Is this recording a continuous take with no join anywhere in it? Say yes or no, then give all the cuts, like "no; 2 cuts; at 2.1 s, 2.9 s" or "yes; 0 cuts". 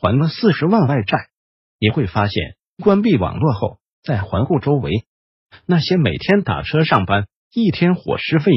yes; 0 cuts